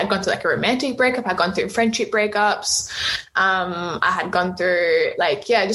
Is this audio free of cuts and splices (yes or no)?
yes